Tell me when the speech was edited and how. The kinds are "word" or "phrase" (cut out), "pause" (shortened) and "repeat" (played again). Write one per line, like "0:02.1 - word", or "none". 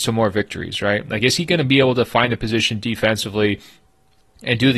none